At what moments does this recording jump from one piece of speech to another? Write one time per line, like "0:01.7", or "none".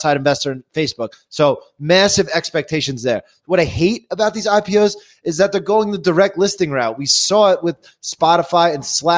none